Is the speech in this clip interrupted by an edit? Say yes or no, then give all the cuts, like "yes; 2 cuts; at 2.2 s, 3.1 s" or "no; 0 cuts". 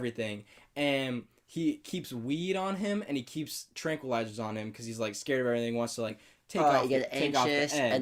no; 0 cuts